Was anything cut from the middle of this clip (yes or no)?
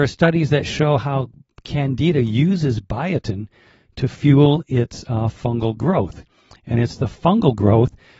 no